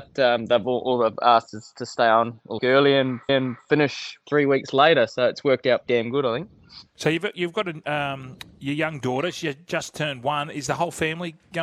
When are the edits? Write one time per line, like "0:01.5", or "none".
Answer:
0:02.6
0:03.3
0:05.9